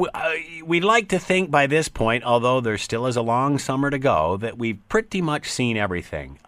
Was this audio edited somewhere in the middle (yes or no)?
no